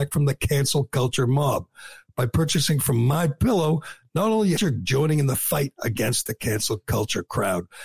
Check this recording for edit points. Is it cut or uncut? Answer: cut